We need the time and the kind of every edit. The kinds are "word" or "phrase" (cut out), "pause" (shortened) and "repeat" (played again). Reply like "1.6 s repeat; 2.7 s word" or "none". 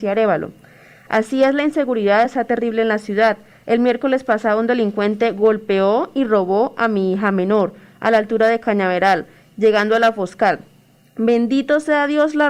none